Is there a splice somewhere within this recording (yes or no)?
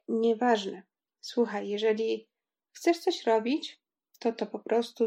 no